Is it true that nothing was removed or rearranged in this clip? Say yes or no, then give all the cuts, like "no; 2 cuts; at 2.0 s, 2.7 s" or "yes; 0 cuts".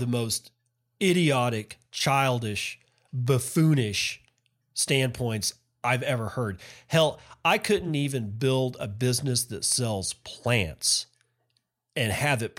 yes; 0 cuts